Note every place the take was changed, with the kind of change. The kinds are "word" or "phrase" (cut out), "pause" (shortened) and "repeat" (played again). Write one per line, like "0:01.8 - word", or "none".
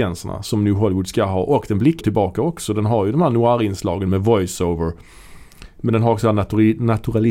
0:02.0 - word